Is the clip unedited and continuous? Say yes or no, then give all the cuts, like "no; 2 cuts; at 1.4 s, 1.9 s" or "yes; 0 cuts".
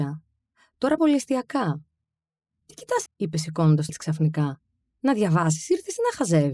no; 3 cuts; at 1.0 s, 3.1 s, 3.9 s